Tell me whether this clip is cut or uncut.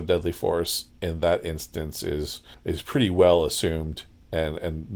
cut